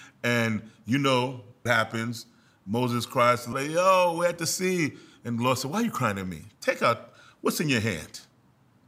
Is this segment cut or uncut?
cut